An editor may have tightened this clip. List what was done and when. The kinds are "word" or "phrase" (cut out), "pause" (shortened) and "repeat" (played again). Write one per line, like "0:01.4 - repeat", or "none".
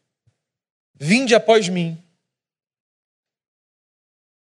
none